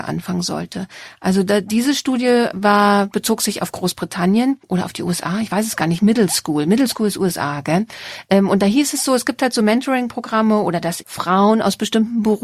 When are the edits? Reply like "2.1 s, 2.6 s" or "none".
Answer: 4.6 s, 11.0 s